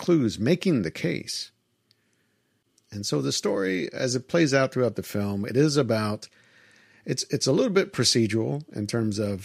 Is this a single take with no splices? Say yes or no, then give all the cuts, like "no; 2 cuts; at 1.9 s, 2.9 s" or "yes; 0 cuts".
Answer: yes; 0 cuts